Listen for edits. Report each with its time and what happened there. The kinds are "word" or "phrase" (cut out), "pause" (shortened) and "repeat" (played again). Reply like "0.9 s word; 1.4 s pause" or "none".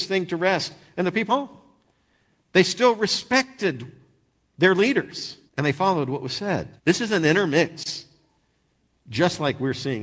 1.3 s word; 5.5 s pause; 6.8 s pause